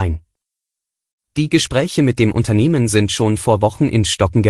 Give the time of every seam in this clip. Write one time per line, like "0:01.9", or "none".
none